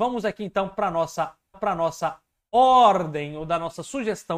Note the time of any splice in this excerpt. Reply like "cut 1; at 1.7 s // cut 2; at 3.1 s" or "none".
cut 1; at 1.5 s